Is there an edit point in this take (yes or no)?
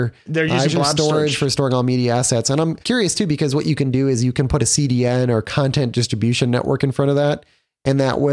yes